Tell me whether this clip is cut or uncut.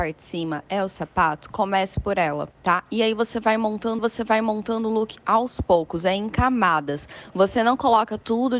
cut